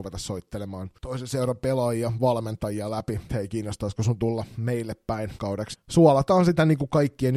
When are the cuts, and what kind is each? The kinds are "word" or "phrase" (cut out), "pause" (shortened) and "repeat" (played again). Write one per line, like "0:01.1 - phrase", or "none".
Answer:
0:01.0 - pause
0:03.3 - word
0:05.4 - word
0:05.7 - word